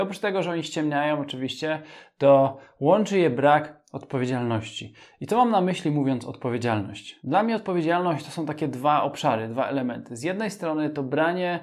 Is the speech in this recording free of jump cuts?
yes; 0 cuts

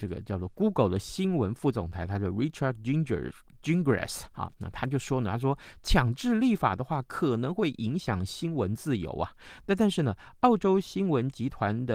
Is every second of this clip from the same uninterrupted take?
yes; 0 cuts

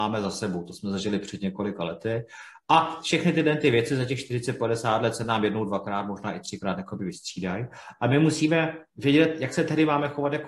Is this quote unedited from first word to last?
yes; 0 cuts

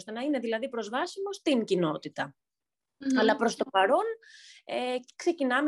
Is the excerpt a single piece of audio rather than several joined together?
yes; 0 cuts

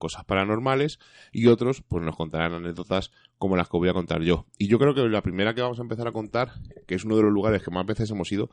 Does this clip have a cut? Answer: no; 0 cuts

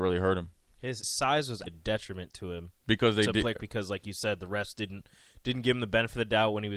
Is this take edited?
yes; 3 cuts; at 1.0 s, 1.7 s, 3.6 s

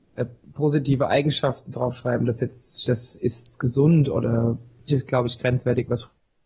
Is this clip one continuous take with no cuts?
no; 2 cuts; at 2.8 s, 4.9 s

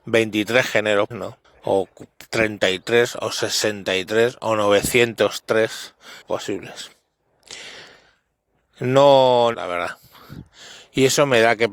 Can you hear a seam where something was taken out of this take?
yes; 4 cuts; at 1.1 s, 1.4 s, 6.2 s, 9.5 s

